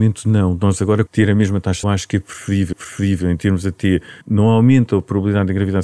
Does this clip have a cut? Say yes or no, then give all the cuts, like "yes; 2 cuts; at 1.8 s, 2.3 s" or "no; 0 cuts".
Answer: yes; 4 cuts; at 1.1 s, 1.8 s, 2.7 s, 4.2 s